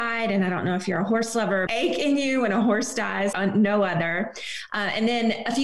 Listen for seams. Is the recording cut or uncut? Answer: cut